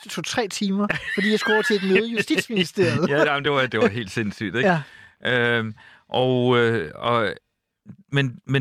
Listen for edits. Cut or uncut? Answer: uncut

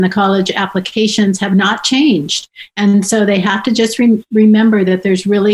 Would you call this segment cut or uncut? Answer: uncut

